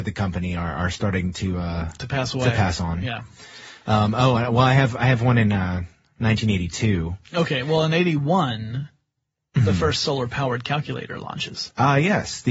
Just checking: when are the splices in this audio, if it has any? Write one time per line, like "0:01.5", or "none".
none